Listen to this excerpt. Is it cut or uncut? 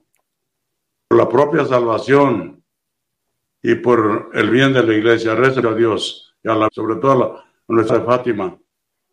cut